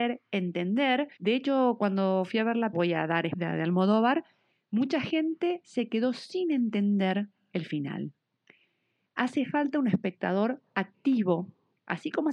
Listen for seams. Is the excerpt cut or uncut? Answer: cut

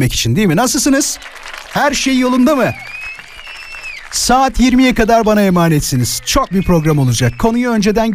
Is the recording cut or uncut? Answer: cut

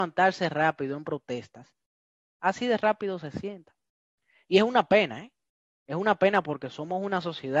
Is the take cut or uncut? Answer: uncut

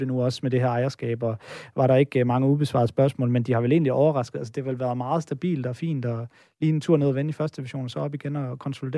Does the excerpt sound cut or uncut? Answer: uncut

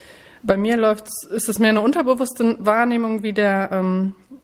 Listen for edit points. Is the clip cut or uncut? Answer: uncut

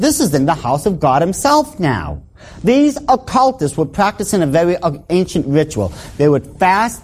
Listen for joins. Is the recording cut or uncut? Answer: uncut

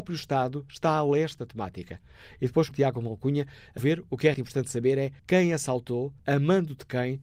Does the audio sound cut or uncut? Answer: cut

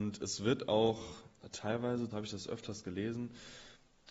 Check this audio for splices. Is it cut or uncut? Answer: cut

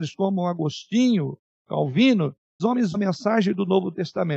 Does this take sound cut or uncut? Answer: cut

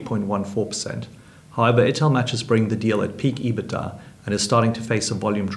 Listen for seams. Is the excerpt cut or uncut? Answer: uncut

